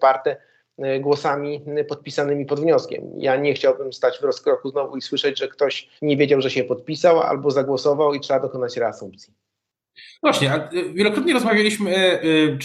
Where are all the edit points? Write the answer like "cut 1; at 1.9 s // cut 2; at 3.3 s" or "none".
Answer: cut 1; at 6.0 s